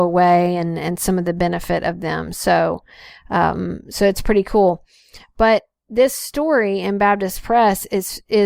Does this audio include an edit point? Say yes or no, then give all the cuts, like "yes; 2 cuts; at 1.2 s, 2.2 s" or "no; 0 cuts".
no; 0 cuts